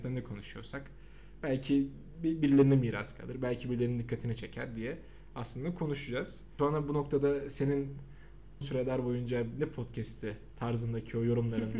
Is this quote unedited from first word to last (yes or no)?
no